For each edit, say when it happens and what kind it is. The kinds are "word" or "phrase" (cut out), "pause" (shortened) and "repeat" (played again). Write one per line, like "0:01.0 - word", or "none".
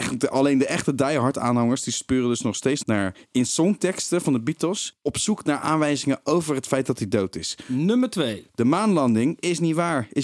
0:02.8 - word